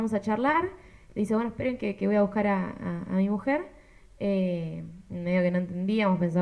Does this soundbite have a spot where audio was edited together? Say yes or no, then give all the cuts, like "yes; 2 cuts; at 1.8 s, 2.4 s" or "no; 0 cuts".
no; 0 cuts